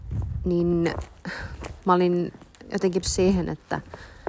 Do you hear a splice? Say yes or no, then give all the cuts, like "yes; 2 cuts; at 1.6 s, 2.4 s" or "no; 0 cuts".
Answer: yes; 1 cut; at 3.0 s